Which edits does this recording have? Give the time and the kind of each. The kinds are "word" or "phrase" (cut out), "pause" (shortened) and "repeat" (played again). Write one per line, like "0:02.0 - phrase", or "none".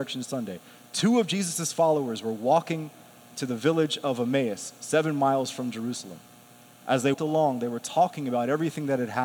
0:07.1 - word